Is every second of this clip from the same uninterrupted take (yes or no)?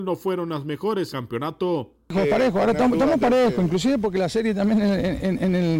no